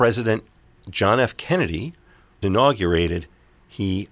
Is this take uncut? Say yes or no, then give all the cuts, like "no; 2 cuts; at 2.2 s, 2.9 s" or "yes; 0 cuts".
no; 1 cut; at 2.4 s